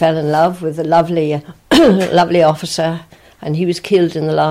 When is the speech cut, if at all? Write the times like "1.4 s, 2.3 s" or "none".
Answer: none